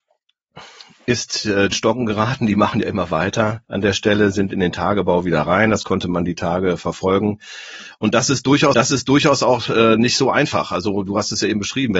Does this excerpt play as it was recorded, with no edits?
no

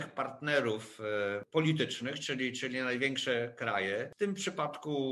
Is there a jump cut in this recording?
no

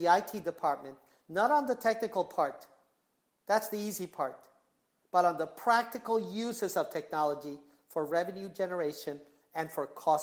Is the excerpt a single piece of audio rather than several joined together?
yes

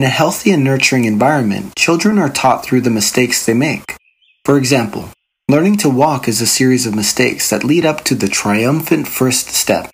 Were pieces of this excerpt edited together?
no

